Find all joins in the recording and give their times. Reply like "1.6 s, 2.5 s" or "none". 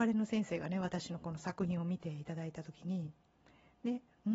3.2 s